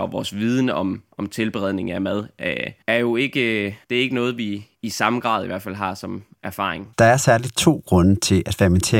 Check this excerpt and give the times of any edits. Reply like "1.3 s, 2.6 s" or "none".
1.1 s, 3.8 s, 4.7 s, 6.9 s